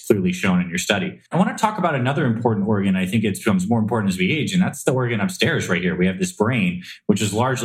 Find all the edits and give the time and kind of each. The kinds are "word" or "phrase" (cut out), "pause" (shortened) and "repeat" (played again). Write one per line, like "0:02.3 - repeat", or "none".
0:01.3 - pause